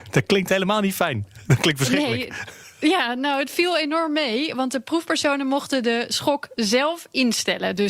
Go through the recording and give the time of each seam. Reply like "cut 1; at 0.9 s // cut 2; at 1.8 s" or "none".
none

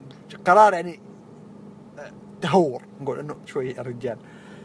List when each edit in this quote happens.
cut 1; at 3.0 s // cut 2; at 3.5 s

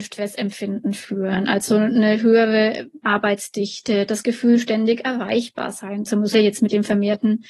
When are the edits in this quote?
cut 1; at 3.0 s // cut 2; at 6.3 s

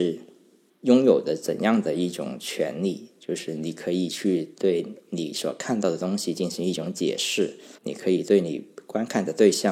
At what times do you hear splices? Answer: cut 1; at 7.8 s

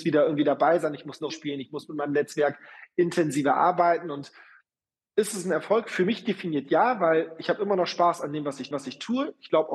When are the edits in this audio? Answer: cut 1; at 1.3 s // cut 2; at 8.7 s

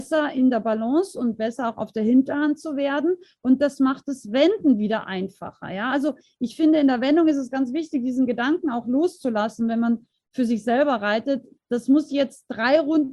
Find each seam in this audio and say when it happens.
none

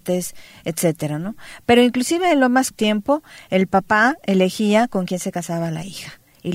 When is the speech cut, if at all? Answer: cut 1; at 2.7 s

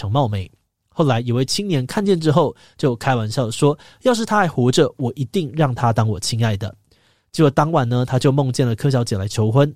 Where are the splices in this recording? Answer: none

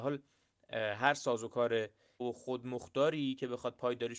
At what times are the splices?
cut 1; at 2.2 s

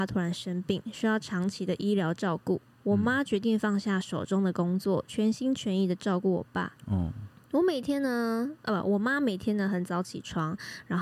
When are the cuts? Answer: cut 1; at 6.8 s

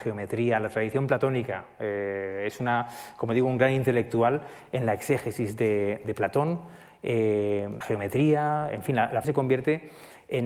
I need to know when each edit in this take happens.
cut 1; at 6.0 s // cut 2; at 7.8 s // cut 3; at 9.2 s

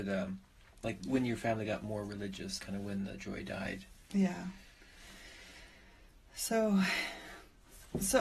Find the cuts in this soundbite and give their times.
cut 1; at 2.6 s

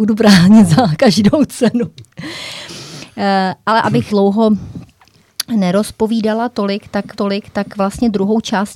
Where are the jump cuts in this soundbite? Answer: cut 1; at 4.1 s // cut 2; at 7.1 s

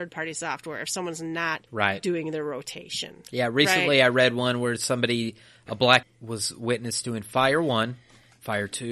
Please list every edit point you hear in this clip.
cut 1; at 1.7 s // cut 2; at 6.0 s

